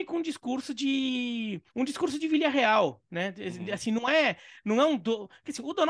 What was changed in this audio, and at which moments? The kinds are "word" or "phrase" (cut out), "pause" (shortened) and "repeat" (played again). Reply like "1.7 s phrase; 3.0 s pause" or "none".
1.7 s pause